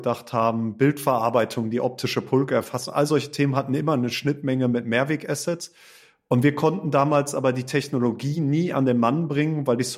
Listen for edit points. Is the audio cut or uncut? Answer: uncut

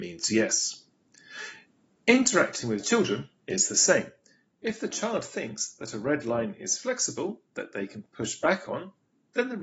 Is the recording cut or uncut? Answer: uncut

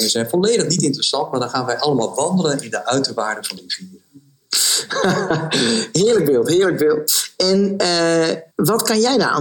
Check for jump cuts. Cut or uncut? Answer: cut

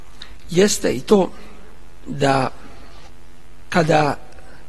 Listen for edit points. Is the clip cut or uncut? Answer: uncut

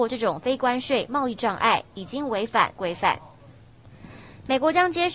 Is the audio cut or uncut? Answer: cut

